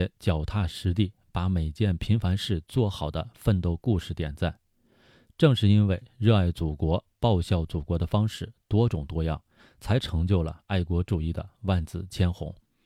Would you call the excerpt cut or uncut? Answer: uncut